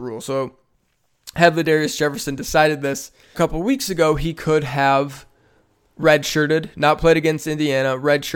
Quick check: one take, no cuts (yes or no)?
no